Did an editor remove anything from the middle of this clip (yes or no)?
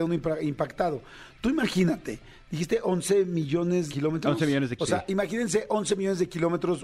yes